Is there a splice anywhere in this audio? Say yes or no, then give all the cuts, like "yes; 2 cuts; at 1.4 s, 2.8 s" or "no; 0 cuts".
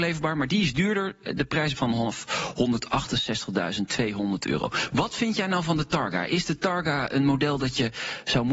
yes; 1 cut; at 1.8 s